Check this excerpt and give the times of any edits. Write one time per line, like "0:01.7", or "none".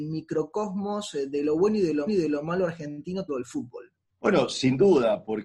0:02.1
0:03.3
0:04.1